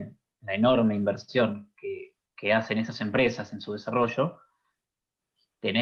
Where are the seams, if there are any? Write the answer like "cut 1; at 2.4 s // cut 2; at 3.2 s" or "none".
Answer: cut 1; at 2.3 s

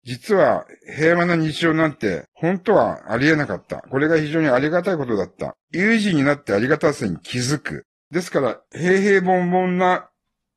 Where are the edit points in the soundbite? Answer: cut 1; at 2.3 s // cut 2; at 5.6 s // cut 3; at 7.9 s // cut 4; at 8.7 s

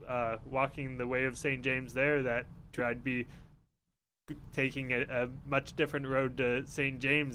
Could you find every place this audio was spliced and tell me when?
cut 1; at 2.8 s

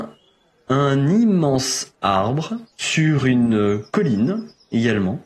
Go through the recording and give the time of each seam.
cut 1; at 2.7 s

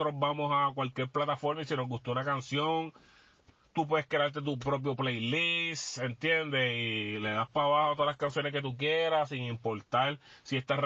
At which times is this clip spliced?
none

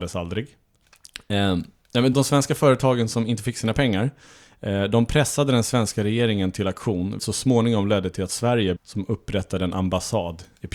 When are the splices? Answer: cut 1; at 2.1 s // cut 2; at 7.2 s // cut 3; at 8.8 s

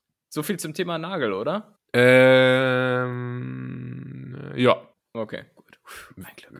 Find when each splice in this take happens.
cut 1; at 1.8 s // cut 2; at 4.9 s

